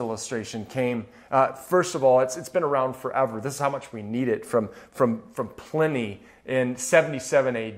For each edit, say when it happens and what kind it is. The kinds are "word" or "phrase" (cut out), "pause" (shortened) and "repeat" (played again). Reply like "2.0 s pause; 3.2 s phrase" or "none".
none